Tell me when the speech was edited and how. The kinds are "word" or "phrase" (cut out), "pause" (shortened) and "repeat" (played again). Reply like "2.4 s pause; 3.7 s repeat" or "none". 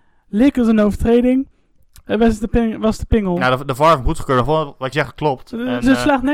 4.9 s word